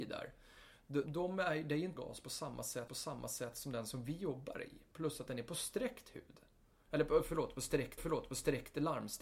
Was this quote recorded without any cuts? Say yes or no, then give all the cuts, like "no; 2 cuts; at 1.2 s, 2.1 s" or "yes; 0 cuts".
no; 4 cuts; at 1.1 s, 2.0 s, 2.9 s, 8.0 s